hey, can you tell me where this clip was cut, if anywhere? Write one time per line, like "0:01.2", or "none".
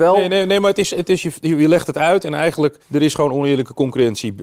0:02.8